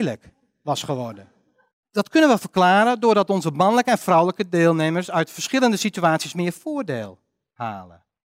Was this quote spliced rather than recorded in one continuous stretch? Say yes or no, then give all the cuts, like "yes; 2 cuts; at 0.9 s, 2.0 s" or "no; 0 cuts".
no; 0 cuts